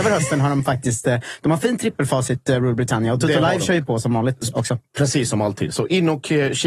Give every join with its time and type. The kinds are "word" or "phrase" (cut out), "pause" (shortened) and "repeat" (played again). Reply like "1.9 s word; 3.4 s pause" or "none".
none